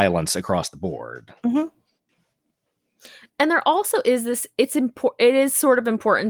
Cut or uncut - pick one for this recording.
uncut